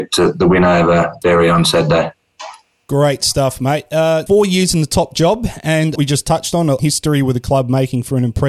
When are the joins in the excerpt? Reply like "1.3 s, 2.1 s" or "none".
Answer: 4.3 s, 6.0 s, 6.8 s